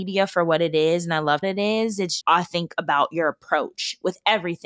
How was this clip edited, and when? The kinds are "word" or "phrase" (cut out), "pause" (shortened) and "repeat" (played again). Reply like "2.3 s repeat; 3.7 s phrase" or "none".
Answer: 1.4 s phrase; 2.2 s word